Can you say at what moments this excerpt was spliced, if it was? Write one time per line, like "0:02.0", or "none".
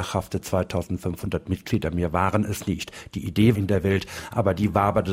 0:03.5